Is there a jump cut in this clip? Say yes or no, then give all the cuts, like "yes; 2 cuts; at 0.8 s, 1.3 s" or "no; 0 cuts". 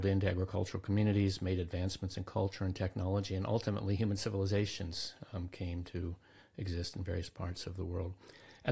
no; 0 cuts